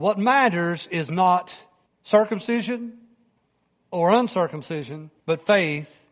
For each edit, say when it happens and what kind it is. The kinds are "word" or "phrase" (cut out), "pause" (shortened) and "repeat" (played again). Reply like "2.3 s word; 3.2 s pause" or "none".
1.9 s pause; 5.2 s pause

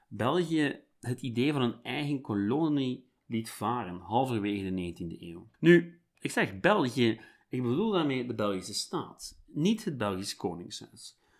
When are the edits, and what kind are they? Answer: 5.5 s pause

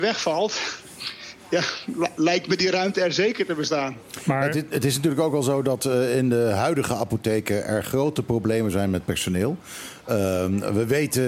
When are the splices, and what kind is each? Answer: none

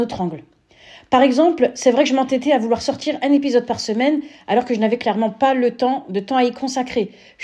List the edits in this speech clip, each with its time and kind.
none

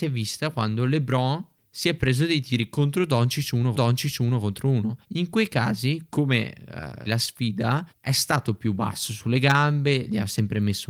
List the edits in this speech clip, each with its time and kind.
3.7 s repeat; 5.0 s pause; 7.1 s phrase; 7.9 s pause

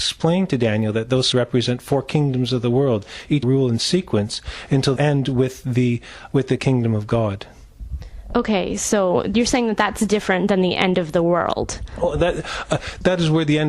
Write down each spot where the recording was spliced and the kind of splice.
1.3 s phrase; 3.4 s phrase; 5.0 s phrase; 6.6 s phrase

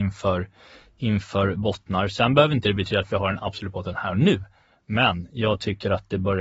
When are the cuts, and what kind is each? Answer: none

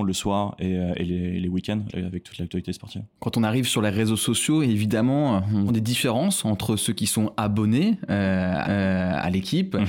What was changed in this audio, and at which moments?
1.9 s word; 5.7 s phrase; 8.6 s repeat

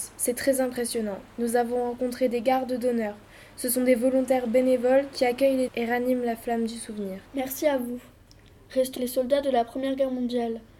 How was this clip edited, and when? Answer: 5.7 s word; 7.3 s pause; 9.0 s word

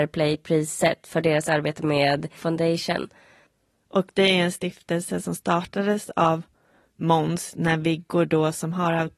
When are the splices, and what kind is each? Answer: 2.4 s word

